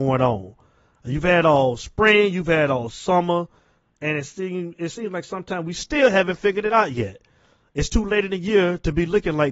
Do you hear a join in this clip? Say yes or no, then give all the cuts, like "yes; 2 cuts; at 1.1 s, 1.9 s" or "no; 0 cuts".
no; 0 cuts